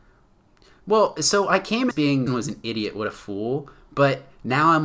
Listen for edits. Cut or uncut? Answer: cut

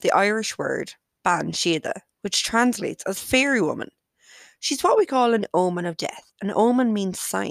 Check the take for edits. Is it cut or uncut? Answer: uncut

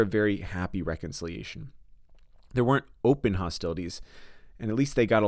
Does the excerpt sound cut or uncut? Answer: uncut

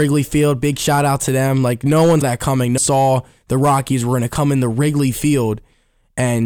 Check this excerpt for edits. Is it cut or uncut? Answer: cut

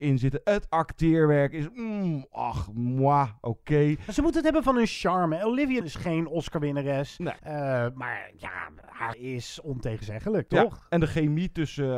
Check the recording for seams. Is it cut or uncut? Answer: cut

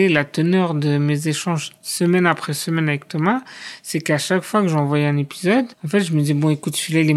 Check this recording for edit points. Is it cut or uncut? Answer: cut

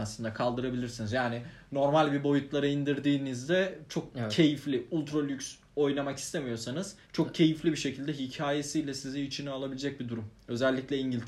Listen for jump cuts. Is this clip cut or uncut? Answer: cut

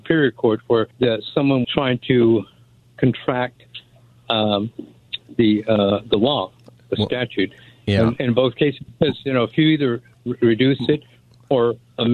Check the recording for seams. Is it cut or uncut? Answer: cut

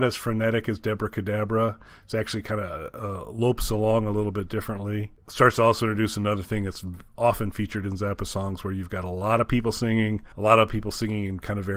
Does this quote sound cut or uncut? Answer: uncut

